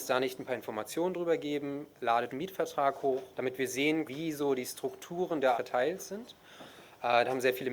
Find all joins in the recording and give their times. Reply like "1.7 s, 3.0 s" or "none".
2.3 s, 3.3 s, 4.0 s, 5.5 s